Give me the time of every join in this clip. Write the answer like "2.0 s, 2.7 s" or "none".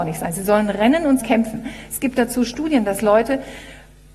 1.2 s

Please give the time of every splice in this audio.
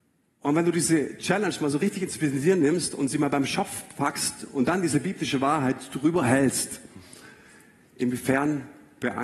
none

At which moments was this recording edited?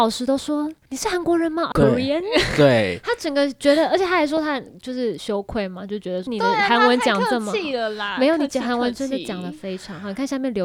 1.7 s, 6.3 s

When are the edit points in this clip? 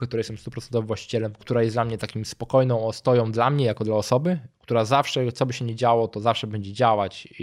none

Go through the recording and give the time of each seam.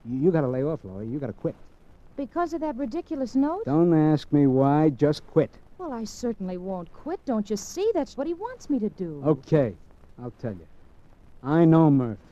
8.1 s

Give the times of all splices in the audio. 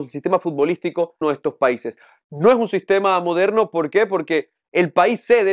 1.2 s

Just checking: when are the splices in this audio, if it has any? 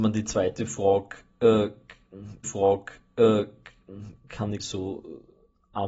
2.4 s, 4.6 s

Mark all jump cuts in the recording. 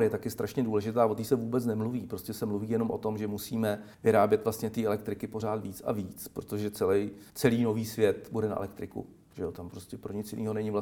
3.9 s, 7.3 s

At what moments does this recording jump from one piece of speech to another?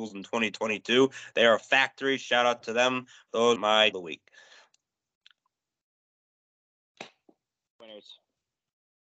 1.6 s, 3.6 s, 3.9 s

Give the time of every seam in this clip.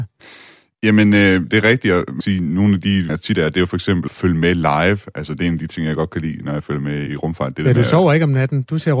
2.2 s, 3.1 s, 4.1 s, 7.1 s

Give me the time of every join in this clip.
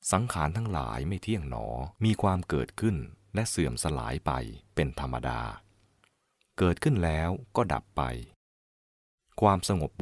2.0 s

